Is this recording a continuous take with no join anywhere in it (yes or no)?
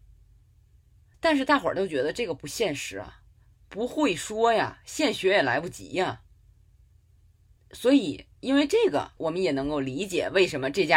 yes